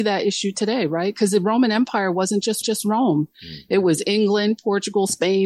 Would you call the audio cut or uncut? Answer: cut